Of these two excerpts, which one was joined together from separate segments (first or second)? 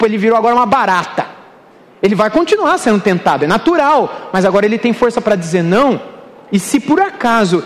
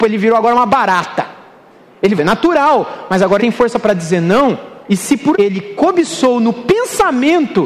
second